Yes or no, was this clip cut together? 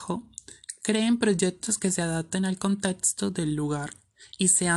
no